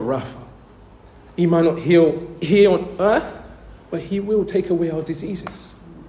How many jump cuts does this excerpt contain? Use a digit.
0